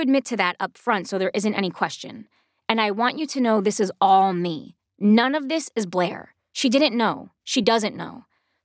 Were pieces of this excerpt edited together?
no; 0 cuts

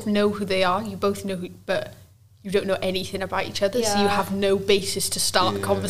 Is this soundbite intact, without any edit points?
yes; 0 cuts

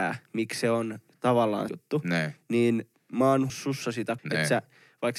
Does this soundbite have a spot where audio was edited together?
yes; 4 cuts; at 1.7 s, 2.9 s, 3.5 s, 4.2 s

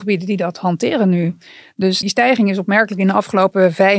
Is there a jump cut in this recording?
yes; 1 cut; at 2.0 s

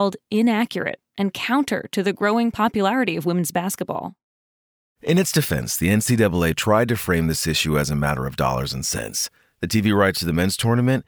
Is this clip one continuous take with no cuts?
yes; 0 cuts

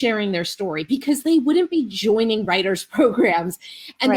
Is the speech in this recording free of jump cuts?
yes; 0 cuts

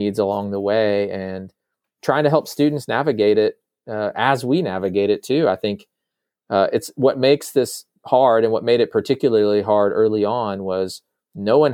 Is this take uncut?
yes; 0 cuts

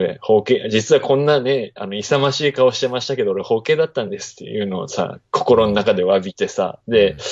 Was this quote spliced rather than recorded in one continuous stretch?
no; 0 cuts

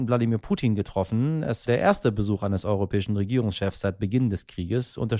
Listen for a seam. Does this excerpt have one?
yes; 1 cut; at 1.7 s

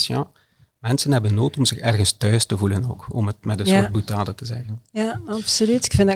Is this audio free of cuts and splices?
yes; 0 cuts

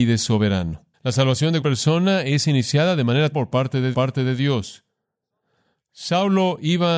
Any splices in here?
yes; 4 cuts; at 0.9 s, 1.6 s, 3.3 s, 3.9 s

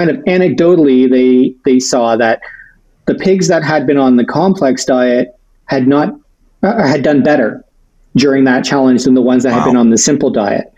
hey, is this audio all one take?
yes; 0 cuts

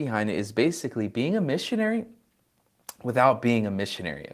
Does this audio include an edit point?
no; 0 cuts

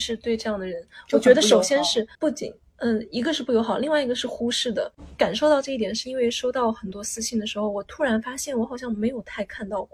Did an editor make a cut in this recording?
yes; 1 cut; at 2.1 s

